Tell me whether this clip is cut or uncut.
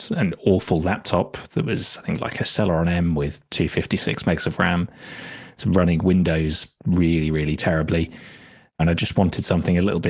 uncut